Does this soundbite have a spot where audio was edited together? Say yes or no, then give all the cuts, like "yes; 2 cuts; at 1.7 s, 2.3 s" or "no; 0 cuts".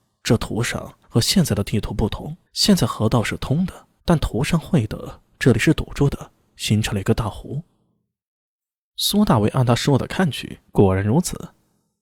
yes; 4 cuts; at 1.0 s, 2.5 s, 4.0 s, 10.7 s